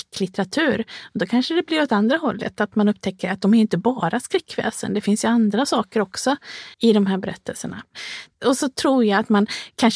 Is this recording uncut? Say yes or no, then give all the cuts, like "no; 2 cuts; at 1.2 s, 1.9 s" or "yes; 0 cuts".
no; 1 cut; at 6.7 s